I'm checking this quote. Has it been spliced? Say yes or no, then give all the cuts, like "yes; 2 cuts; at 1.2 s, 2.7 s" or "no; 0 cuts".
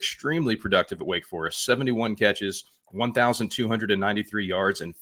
no; 0 cuts